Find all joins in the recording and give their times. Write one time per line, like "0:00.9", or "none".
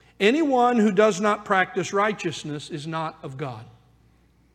none